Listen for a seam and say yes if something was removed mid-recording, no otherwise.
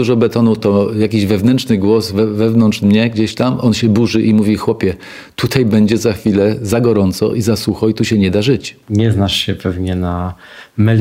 no